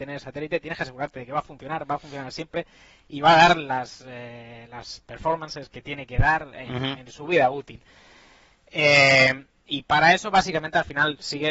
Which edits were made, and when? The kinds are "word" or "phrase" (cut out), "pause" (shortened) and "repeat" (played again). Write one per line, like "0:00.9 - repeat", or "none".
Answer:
none